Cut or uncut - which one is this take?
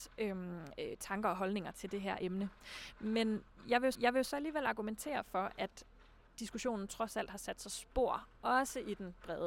cut